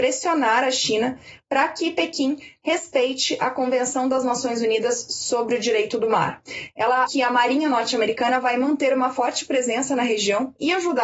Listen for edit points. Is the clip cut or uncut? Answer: cut